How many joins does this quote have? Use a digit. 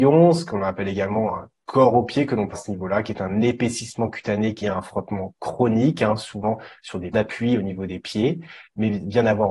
3